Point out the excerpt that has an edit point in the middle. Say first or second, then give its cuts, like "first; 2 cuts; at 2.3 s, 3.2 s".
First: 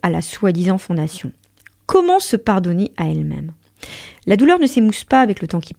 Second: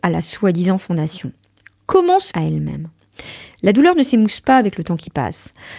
second; 1 cut; at 2.3 s